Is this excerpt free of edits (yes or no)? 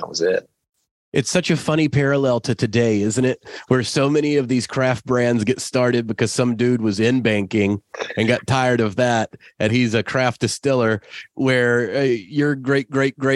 no